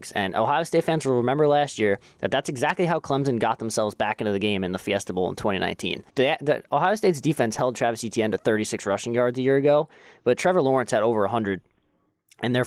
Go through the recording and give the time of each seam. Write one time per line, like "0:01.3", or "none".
0:06.1